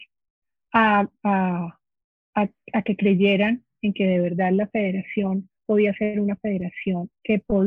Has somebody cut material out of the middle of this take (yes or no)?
no